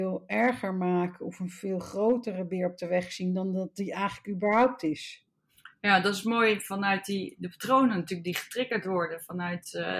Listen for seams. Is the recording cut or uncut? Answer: uncut